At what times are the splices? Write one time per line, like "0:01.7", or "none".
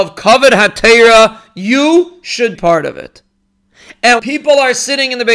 0:02.5
0:04.2